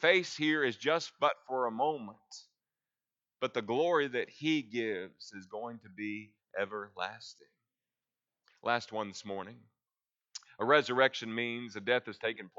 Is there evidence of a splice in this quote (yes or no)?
no